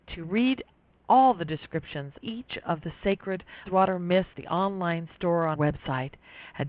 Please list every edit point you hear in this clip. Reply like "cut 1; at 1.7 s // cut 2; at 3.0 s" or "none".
cut 1; at 2.2 s // cut 2; at 3.7 s // cut 3; at 4.3 s // cut 4; at 5.6 s